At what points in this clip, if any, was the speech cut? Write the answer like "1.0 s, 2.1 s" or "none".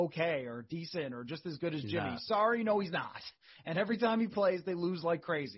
none